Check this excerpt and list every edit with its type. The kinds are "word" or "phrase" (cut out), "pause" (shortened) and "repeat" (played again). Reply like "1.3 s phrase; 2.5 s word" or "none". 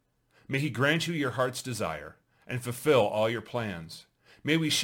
none